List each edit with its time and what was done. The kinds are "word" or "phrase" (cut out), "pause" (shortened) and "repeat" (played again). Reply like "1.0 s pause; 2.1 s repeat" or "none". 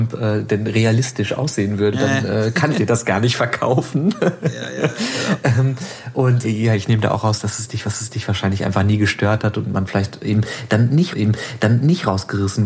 1.9 s word; 2.7 s word; 6.4 s word; 7.8 s repeat; 11.1 s repeat